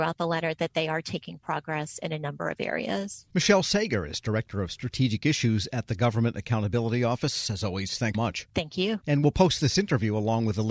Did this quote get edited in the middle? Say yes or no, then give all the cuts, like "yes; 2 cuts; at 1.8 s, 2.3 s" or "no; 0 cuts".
yes; 2 cuts; at 3.3 s, 8.1 s